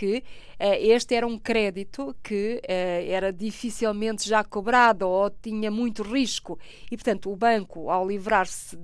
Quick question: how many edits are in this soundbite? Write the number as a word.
zero